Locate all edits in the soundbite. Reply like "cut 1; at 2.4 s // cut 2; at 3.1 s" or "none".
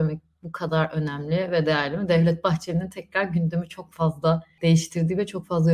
none